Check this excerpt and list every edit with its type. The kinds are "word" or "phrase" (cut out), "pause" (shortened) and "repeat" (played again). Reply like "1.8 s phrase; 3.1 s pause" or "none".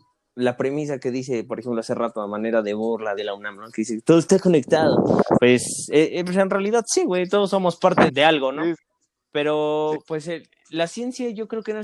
3.2 s phrase; 8.1 s word; 9.0 s pause